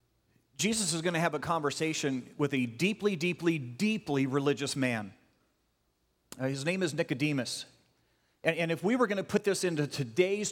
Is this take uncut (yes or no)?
yes